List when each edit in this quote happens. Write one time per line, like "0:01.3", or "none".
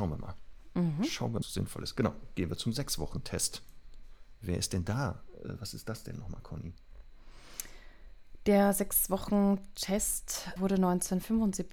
0:01.4
0:10.6